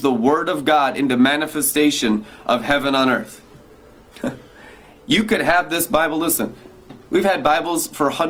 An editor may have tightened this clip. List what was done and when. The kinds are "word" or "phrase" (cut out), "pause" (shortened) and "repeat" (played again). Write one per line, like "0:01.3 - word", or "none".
none